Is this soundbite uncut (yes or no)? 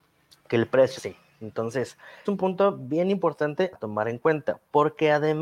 no